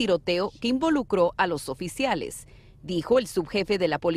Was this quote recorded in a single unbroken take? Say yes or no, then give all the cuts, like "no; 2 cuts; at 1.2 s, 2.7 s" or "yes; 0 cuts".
yes; 0 cuts